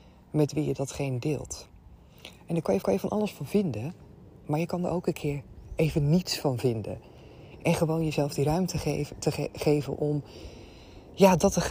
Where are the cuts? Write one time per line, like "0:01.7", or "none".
0:02.8

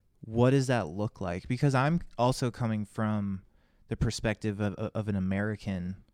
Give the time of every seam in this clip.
none

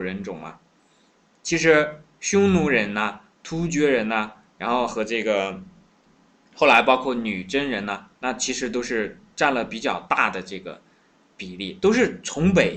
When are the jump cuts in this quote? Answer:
0:08.2

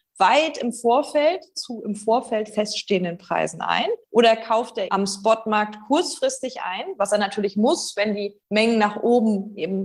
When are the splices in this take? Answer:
0:04.0
0:04.9
0:08.4

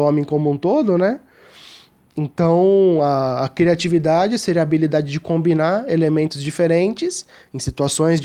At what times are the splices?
none

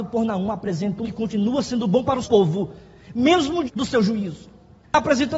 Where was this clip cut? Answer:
0:01.0
0:02.2
0:03.7

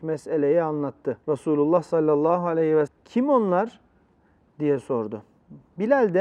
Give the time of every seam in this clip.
0:01.2
0:02.9

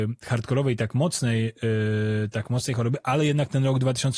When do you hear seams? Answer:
none

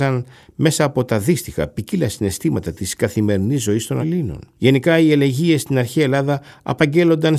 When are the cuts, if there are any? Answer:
0:04.0
0:04.6

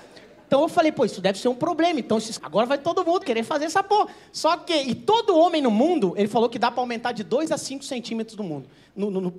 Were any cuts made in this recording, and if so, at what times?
0:02.4
0:03.2

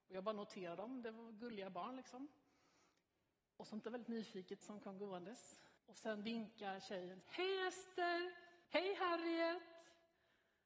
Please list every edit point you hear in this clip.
0:03.8
0:04.6
0:05.8
0:07.2
0:08.6

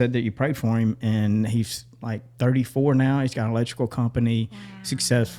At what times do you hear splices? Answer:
none

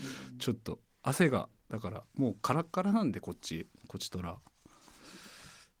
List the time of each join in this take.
none

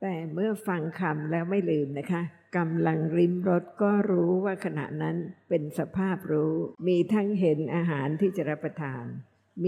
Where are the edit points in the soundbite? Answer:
0:06.8

